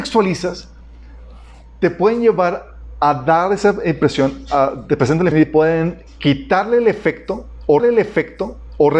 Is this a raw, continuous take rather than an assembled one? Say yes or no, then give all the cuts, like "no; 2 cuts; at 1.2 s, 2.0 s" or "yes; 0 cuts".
no; 2 cuts; at 5.3 s, 7.8 s